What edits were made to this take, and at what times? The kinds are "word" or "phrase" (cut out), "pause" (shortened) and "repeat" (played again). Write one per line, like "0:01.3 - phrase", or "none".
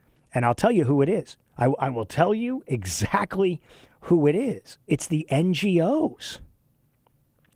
0:01.5 - pause